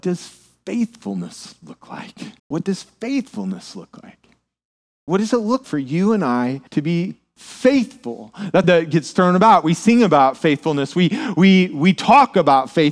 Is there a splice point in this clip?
yes; 5 cuts; at 2.4 s, 4.8 s, 5.6 s, 6.7 s, 8.6 s

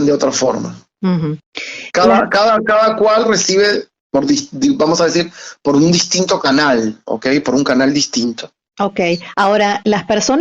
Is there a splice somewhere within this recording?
yes; 1 cut; at 4.0 s

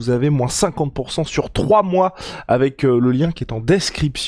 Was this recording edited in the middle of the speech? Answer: no; 0 cuts

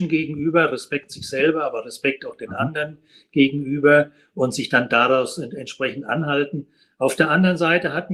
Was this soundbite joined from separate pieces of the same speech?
no; 0 cuts

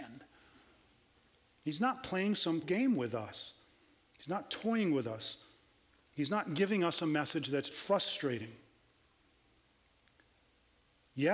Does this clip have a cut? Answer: yes; 2 cuts; at 2.6 s, 7.7 s

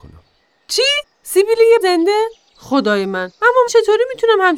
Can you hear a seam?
yes; 3 cuts; at 1.8 s, 2.5 s, 3.7 s

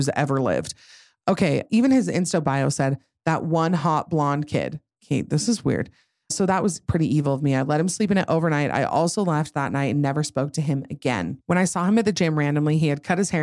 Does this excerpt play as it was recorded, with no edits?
yes; 0 cuts

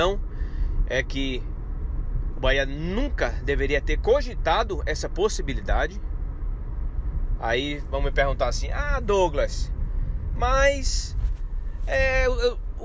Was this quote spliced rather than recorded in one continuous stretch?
no; 0 cuts

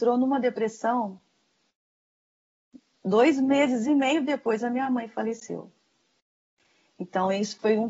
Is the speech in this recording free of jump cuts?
yes; 0 cuts

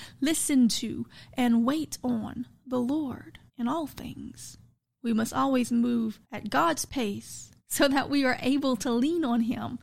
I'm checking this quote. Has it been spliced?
yes; 4 cuts; at 3.5 s, 4.8 s, 6.2 s, 7.6 s

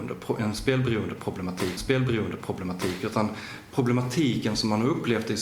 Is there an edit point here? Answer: yes; 1 cut; at 1.8 s

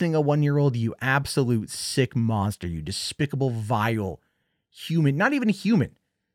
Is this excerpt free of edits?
yes; 0 cuts

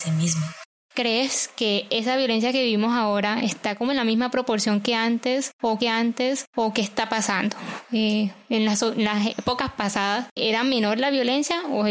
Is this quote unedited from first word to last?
no; 3 cuts; at 1.5 s, 5.8 s, 10.4 s

